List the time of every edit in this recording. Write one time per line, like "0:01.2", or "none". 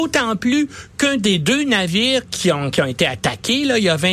none